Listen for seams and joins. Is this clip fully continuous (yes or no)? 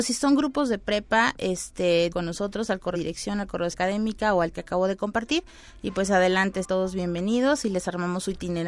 no